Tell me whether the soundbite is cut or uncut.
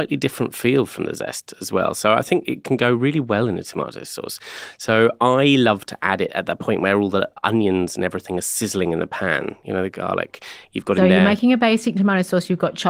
cut